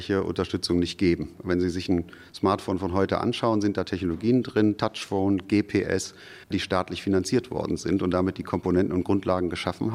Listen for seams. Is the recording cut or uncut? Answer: cut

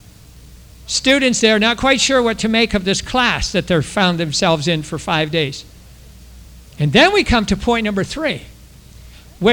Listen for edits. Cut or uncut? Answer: uncut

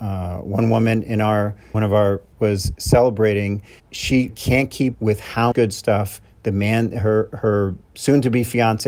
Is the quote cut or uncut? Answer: cut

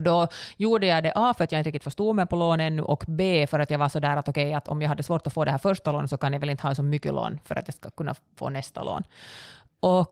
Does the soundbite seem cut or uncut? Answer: uncut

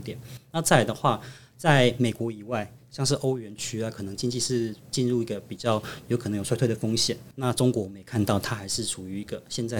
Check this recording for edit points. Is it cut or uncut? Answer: cut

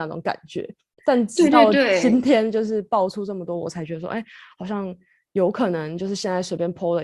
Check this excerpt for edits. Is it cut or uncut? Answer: uncut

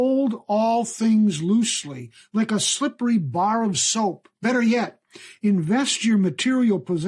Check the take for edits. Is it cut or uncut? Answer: cut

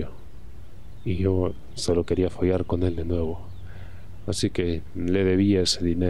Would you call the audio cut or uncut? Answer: uncut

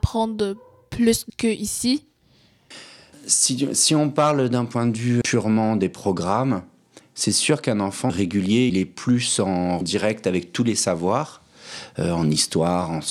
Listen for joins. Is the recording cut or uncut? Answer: cut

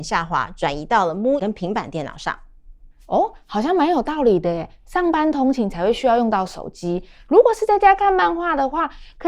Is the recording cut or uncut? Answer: cut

